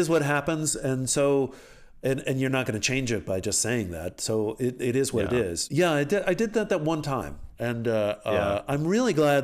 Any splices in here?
no; 0 cuts

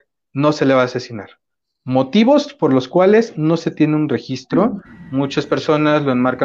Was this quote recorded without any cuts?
yes; 0 cuts

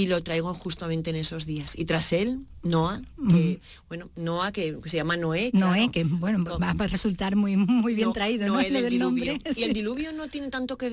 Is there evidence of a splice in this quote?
no; 0 cuts

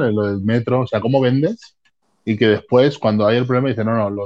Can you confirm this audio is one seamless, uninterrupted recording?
yes; 0 cuts

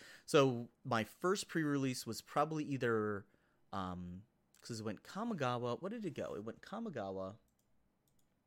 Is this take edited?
no; 0 cuts

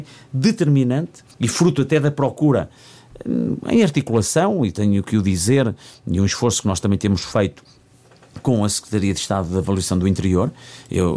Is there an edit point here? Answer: yes; 1 cut; at 1.3 s

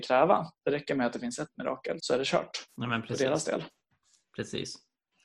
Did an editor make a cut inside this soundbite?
yes; 2 cuts; at 2.0 s, 2.7 s

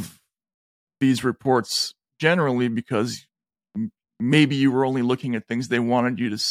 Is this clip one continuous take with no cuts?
yes; 0 cuts

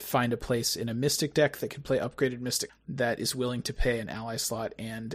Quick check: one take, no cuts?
no; 1 cut; at 2.7 s

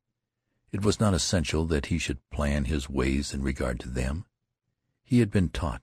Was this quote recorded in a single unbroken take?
yes; 0 cuts

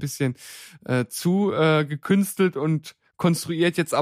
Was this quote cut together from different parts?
no; 0 cuts

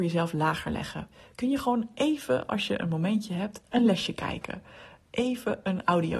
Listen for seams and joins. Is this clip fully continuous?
yes; 0 cuts

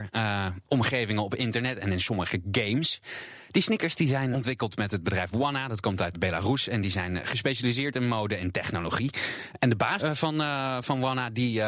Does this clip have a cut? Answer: yes; 3 cuts; at 4.3 s, 6.1 s, 10.0 s

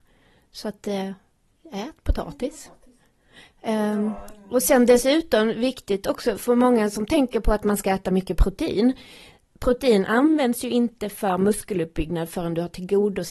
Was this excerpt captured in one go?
yes; 0 cuts

